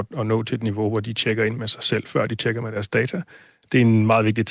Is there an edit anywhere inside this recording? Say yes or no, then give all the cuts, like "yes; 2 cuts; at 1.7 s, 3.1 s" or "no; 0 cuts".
no; 0 cuts